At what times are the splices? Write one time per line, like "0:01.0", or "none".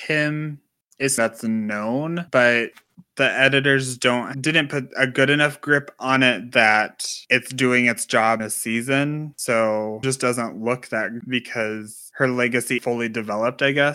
0:01.2
0:04.3
0:08.4
0:10.0
0:11.2
0:12.8